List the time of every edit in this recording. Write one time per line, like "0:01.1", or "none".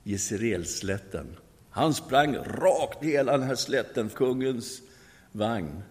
0:03.0
0:04.1